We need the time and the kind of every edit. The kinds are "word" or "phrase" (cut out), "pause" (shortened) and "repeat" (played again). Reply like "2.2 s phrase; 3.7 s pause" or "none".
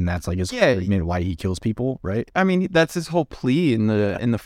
none